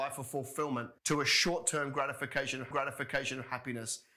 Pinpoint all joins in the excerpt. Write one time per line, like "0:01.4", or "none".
0:01.0
0:02.7